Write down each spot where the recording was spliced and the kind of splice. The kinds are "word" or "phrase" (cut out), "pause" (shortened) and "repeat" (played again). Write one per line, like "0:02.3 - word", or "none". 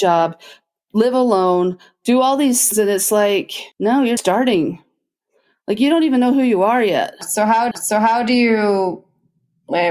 0:02.7 - word
0:03.7 - pause
0:04.2 - word
0:07.7 - repeat